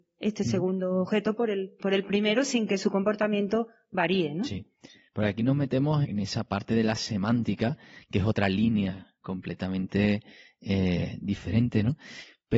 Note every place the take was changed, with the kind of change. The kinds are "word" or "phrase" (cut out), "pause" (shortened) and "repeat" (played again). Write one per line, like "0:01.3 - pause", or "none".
0:06.0 - word